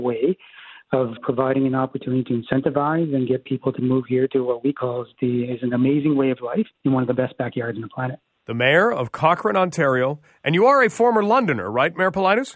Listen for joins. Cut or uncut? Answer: cut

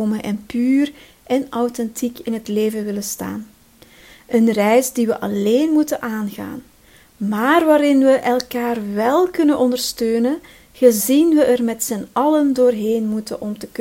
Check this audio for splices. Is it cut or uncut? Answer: uncut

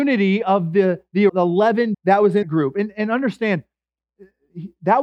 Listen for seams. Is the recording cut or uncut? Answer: cut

